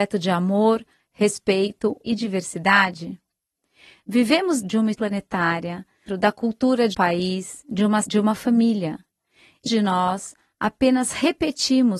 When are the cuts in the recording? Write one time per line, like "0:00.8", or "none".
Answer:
0:02.0
0:04.6
0:04.9
0:06.1
0:06.9
0:08.0
0:09.7